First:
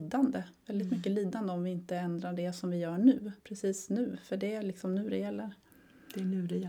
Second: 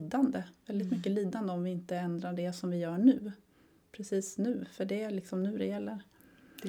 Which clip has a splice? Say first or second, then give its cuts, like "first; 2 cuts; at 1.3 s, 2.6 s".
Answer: first; 1 cut; at 3.4 s